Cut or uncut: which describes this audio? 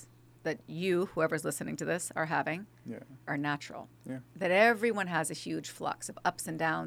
cut